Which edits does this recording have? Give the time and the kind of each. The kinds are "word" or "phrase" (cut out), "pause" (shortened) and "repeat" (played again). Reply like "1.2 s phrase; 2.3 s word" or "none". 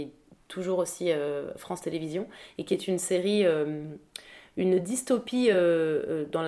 none